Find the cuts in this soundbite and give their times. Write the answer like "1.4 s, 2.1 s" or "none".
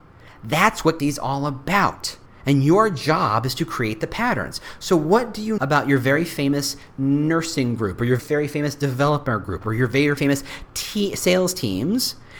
1.0 s, 2.3 s, 5.6 s, 8.2 s, 10.2 s

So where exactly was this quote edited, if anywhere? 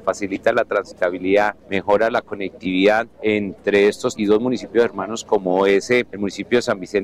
4.1 s

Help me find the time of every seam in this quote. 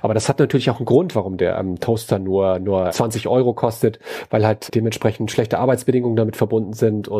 2.9 s, 4.7 s

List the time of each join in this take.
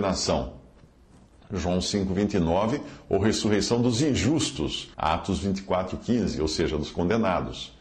4.9 s

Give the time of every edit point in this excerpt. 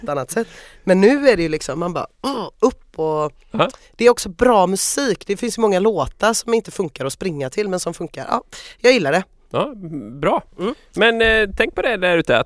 none

